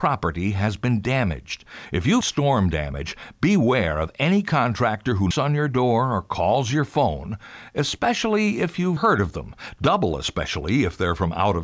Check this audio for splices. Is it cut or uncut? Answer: cut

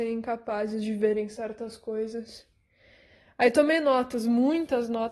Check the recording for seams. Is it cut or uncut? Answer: uncut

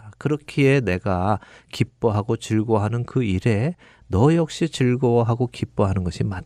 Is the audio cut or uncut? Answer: uncut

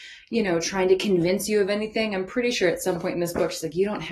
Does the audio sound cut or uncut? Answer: uncut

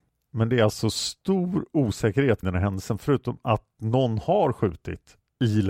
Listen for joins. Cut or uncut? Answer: cut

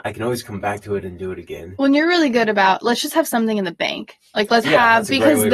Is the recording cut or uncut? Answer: cut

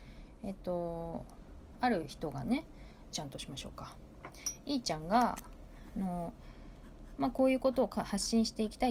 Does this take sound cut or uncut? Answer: cut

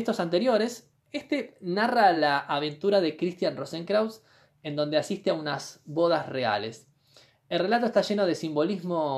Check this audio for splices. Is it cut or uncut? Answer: uncut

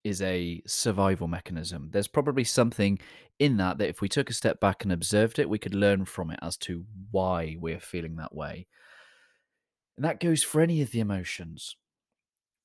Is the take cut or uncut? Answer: uncut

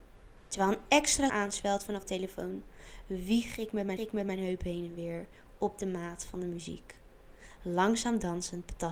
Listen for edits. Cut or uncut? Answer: cut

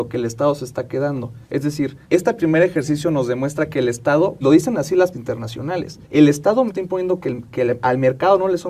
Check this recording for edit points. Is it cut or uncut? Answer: cut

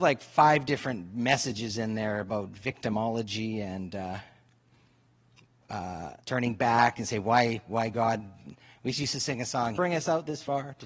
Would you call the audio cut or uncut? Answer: cut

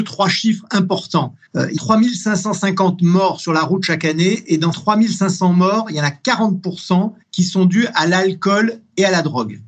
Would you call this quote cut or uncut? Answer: cut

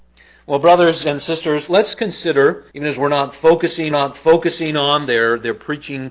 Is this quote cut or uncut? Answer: cut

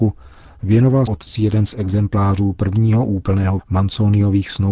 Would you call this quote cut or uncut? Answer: cut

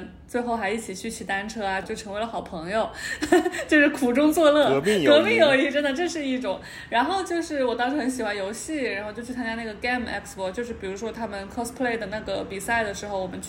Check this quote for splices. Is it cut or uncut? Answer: cut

